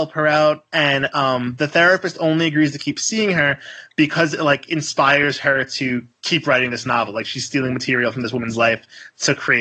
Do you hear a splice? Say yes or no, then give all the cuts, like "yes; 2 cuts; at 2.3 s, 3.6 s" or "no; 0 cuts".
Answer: no; 0 cuts